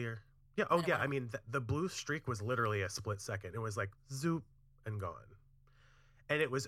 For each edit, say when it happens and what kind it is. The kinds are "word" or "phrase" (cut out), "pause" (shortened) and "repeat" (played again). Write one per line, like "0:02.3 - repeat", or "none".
none